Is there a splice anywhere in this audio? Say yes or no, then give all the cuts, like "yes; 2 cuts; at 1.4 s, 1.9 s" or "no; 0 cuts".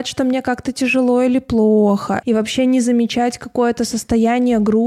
no; 0 cuts